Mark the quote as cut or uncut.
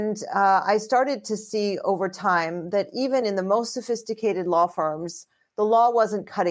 uncut